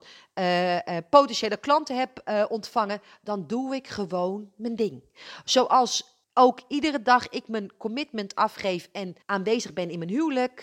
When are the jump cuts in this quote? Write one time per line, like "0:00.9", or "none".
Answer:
0:06.2
0:09.2